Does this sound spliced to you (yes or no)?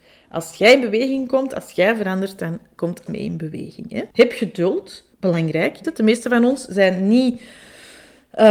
yes